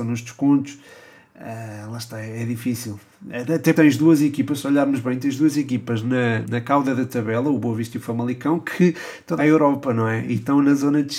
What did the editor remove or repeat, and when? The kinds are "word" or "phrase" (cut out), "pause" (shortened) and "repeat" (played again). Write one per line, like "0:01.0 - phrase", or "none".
0:03.7 - word
0:06.4 - word
0:09.4 - phrase